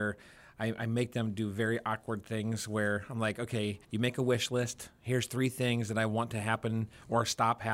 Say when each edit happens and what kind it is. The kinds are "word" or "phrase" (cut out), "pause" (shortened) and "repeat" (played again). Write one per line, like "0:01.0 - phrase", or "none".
0:03.8 - pause